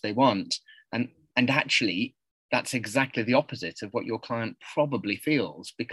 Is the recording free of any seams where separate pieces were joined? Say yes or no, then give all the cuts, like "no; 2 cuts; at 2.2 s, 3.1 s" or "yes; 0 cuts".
yes; 0 cuts